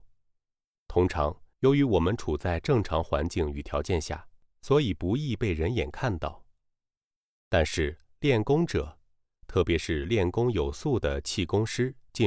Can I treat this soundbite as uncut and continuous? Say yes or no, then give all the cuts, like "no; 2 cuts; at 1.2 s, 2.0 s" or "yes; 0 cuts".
no; 1 cut; at 1.5 s